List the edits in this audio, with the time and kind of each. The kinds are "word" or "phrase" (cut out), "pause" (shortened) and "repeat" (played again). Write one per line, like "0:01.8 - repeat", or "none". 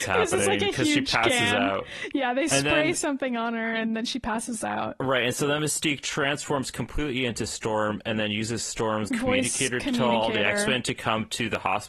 0:09.1 - word